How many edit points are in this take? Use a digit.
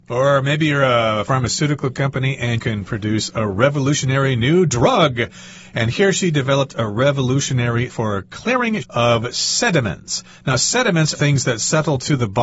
4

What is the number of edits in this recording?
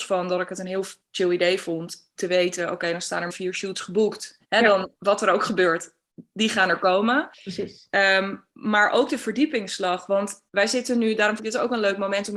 7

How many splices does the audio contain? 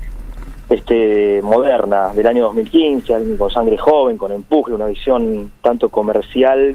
0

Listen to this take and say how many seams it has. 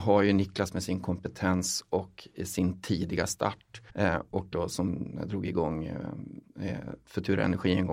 2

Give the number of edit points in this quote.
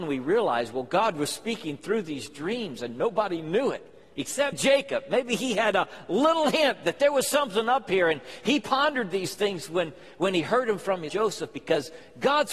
2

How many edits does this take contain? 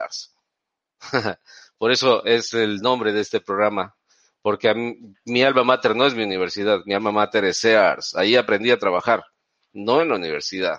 0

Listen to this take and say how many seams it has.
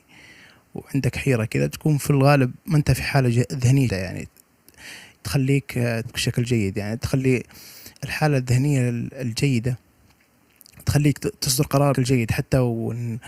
5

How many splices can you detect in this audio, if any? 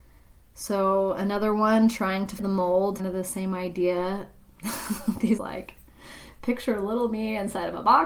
3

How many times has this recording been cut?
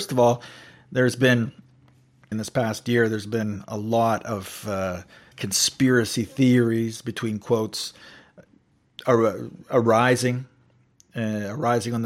2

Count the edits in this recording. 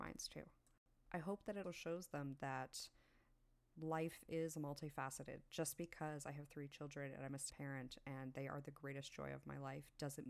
2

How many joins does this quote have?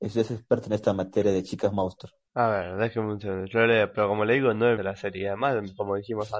2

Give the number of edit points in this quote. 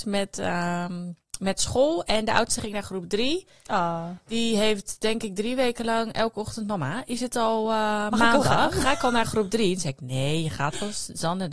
0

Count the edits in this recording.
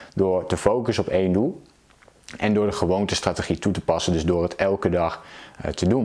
0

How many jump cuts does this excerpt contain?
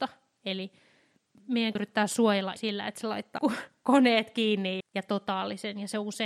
4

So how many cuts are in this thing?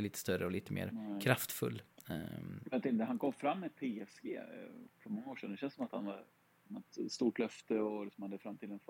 1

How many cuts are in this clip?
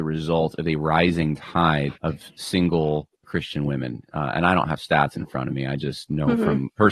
2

